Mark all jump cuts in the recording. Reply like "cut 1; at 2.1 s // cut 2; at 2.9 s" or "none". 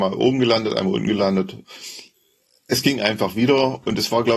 none